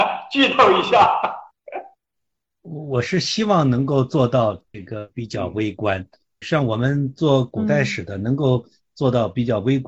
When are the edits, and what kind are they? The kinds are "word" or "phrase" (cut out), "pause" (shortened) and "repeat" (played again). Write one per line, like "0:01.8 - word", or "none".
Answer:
0:06.4 - word